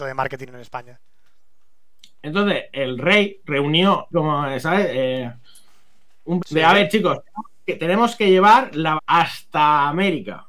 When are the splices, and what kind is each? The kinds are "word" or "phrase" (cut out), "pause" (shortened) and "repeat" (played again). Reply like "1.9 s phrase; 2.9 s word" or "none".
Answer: 4.1 s word; 6.4 s word; 9.0 s word